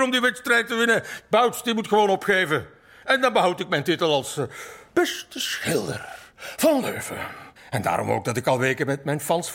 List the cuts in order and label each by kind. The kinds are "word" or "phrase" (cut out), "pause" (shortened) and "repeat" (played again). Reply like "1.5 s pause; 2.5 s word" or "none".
7.6 s pause